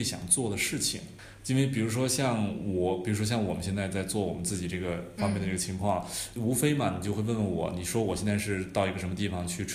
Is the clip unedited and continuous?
no; 1 cut; at 6.4 s

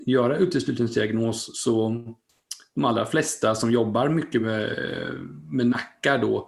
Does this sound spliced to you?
no; 0 cuts

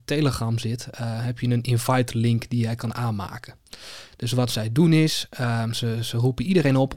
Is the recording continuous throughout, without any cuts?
yes; 0 cuts

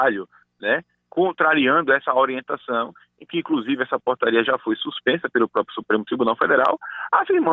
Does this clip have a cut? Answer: no; 0 cuts

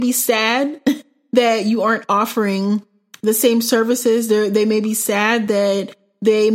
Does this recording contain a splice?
no; 0 cuts

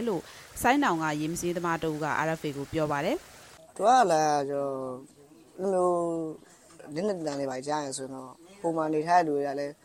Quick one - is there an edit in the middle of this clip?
no; 0 cuts

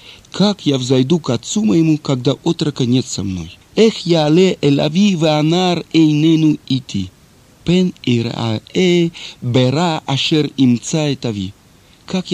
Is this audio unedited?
no; 2 cuts; at 3.6 s, 7.2 s

